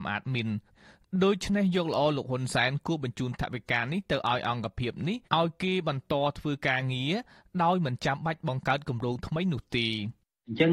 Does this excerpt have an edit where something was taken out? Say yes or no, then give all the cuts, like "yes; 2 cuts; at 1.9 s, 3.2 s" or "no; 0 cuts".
yes; 1 cut; at 5.2 s